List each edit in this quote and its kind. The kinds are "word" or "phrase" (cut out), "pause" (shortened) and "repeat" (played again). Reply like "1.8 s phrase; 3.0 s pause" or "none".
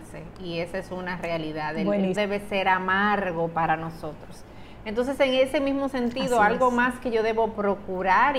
2.1 s word